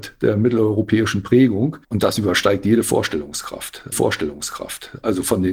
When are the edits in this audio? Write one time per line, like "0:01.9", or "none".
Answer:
0:01.8
0:03.9